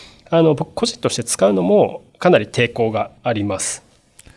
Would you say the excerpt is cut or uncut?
cut